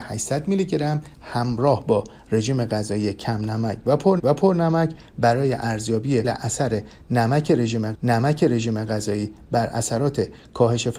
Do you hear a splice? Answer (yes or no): yes